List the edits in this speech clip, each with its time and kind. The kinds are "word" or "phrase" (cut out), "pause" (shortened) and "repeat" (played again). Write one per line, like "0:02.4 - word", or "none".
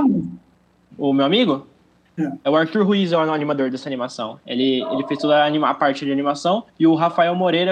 0:06.7 - pause